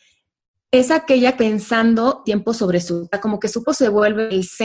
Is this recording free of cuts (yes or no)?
no